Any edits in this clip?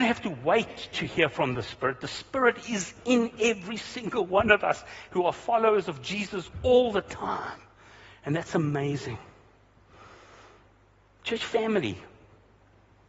no; 0 cuts

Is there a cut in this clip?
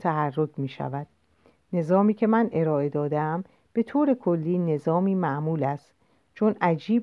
no; 0 cuts

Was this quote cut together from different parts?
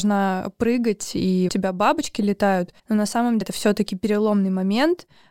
yes; 3 cuts; at 1.5 s, 2.8 s, 3.4 s

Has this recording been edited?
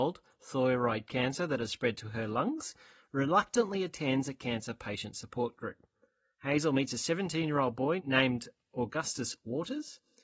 no; 0 cuts

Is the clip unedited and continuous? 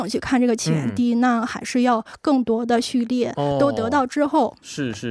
yes; 0 cuts

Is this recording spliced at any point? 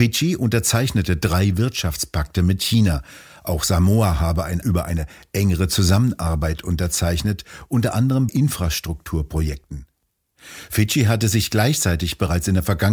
yes; 2 cuts; at 4.6 s, 8.3 s

